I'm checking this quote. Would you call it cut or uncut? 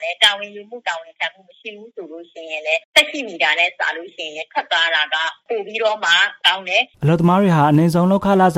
cut